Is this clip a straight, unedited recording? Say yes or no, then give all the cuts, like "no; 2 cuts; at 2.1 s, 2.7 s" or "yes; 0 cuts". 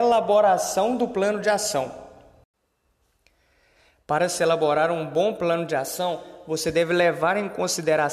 yes; 0 cuts